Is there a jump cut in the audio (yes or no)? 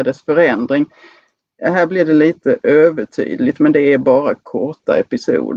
no